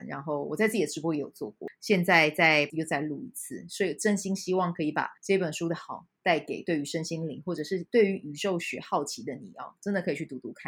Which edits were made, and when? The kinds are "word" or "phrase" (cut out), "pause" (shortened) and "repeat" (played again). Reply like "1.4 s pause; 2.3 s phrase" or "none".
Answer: 2.7 s word; 5.2 s pause